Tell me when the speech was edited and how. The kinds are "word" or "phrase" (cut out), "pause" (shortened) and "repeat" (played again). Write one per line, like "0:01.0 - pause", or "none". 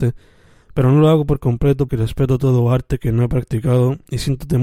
0:01.9 - word